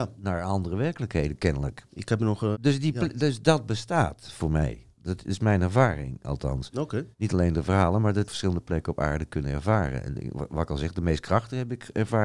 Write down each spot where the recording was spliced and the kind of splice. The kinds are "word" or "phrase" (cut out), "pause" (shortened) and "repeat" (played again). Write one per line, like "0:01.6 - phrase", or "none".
0:01.9 - pause
0:02.5 - word
0:07.1 - pause
0:08.3 - phrase